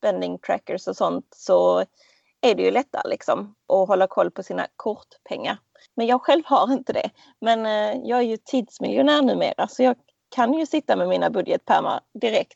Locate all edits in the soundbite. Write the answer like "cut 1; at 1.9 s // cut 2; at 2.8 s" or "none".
none